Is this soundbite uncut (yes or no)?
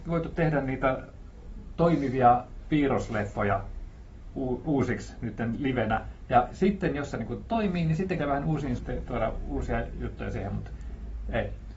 no